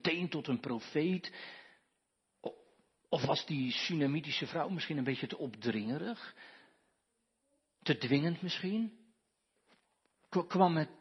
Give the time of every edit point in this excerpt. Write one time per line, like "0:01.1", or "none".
none